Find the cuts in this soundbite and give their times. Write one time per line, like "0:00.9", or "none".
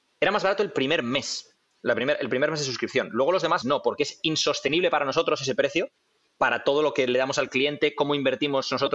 0:03.6